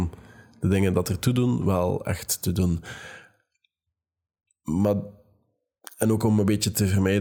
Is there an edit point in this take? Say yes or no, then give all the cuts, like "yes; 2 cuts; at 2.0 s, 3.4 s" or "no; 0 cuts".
no; 0 cuts